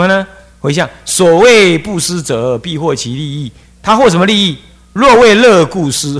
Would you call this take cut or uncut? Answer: uncut